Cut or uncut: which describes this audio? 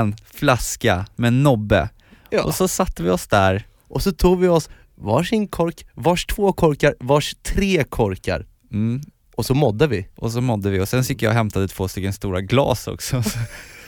uncut